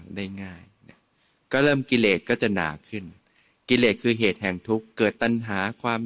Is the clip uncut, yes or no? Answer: yes